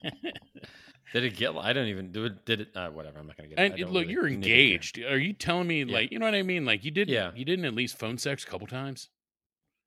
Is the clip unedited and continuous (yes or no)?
no